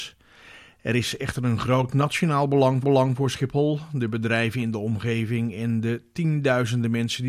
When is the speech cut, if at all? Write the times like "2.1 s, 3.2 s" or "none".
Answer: 2.8 s